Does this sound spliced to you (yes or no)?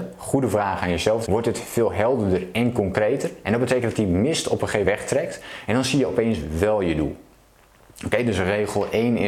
yes